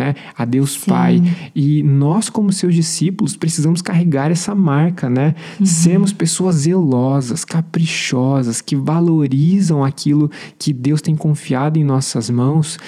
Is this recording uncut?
yes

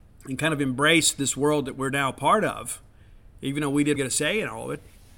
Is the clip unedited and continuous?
no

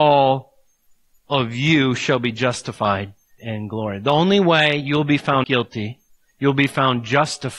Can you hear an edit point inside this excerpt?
yes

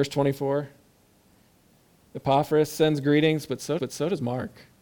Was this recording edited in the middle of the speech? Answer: yes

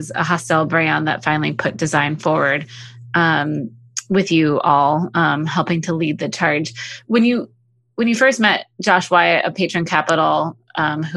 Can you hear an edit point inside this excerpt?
no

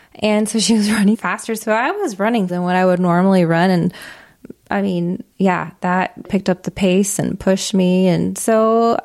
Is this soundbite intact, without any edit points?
no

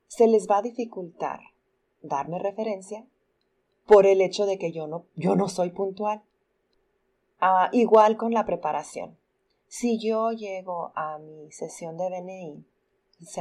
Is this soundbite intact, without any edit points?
yes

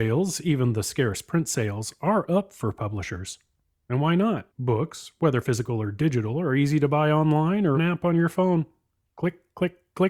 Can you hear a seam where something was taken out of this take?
yes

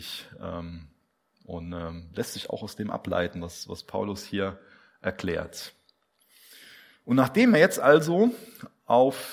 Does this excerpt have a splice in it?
no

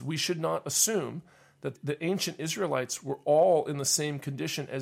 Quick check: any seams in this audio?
no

